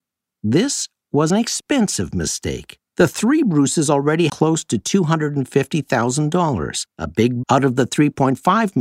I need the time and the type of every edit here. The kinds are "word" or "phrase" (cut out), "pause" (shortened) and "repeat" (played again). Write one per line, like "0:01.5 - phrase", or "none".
0:01.3 - word
0:02.9 - pause
0:04.3 - phrase
0:06.9 - pause
0:07.4 - word